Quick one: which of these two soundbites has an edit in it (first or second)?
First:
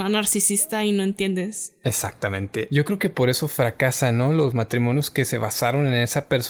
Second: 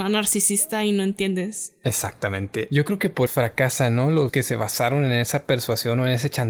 second